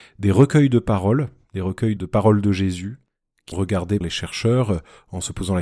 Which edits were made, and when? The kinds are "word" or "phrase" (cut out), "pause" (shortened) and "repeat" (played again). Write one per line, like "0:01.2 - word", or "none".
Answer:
0:02.0 - word
0:03.5 - word
0:04.0 - word